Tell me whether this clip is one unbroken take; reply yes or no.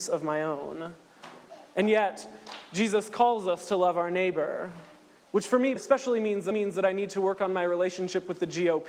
no